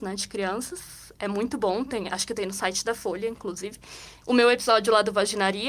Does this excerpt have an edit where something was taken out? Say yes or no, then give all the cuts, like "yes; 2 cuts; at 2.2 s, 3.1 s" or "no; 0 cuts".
no; 0 cuts